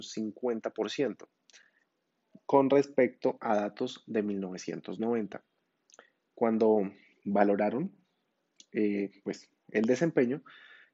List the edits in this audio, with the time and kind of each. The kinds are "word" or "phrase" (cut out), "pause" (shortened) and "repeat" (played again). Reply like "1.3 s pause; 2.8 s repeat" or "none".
none